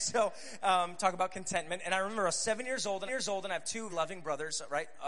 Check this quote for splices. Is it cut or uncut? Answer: cut